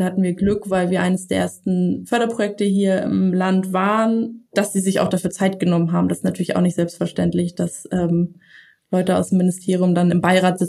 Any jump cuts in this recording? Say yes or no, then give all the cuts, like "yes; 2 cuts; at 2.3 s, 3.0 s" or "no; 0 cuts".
no; 0 cuts